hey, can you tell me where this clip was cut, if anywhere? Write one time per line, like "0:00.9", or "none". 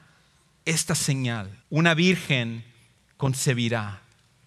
0:01.6